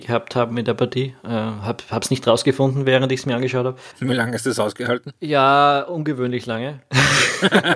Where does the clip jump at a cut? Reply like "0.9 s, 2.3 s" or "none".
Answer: 5.2 s